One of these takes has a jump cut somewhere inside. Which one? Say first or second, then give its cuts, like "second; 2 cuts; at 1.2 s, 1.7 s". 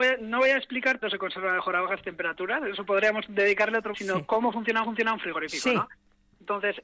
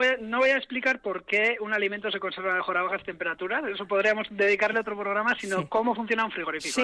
first; 3 cuts; at 1.0 s, 3.9 s, 4.8 s